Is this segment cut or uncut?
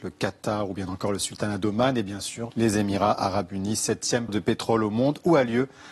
cut